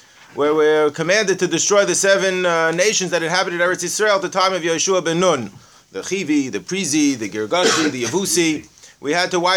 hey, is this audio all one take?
yes; 0 cuts

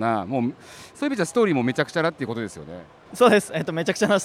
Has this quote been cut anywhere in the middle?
yes; 1 cut; at 3.1 s

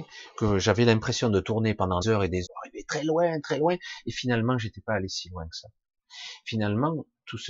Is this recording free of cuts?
no; 3 cuts; at 2.0 s, 2.5 s, 3.4 s

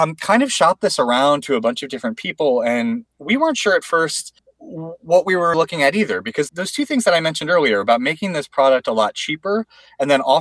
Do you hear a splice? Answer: yes; 3 cuts; at 4.4 s, 5.5 s, 6.5 s

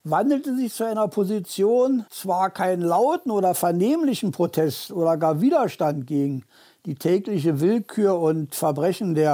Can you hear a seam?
yes; 1 cut; at 2.1 s

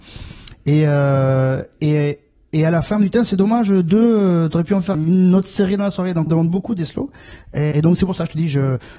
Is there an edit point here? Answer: yes; 3 cuts; at 4.9 s, 6.3 s, 7.7 s

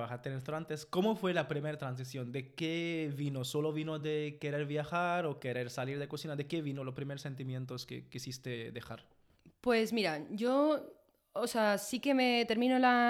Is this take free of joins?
yes; 0 cuts

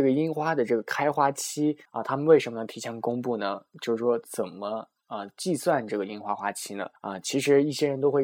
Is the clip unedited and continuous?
no; 2 cuts; at 1.9 s, 7.0 s

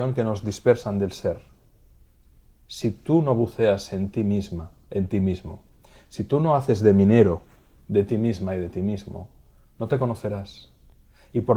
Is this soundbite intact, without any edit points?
yes; 0 cuts

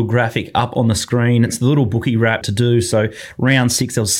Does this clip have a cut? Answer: yes; 1 cut; at 2.4 s

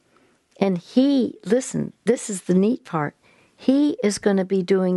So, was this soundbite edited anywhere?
no; 0 cuts

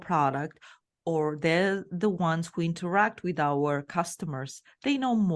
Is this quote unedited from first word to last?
yes; 0 cuts

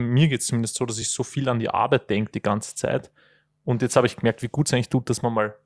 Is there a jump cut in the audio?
no; 0 cuts

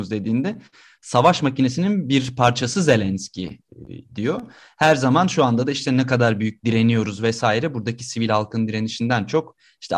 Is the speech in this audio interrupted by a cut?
no; 0 cuts

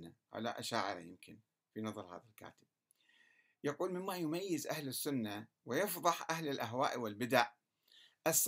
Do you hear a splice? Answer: no; 0 cuts

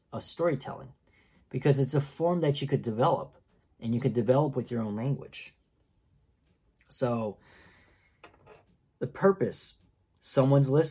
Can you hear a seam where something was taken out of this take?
no; 0 cuts

